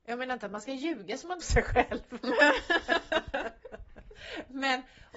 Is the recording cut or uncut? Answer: cut